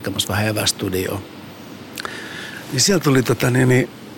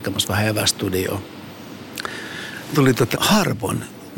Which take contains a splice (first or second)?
second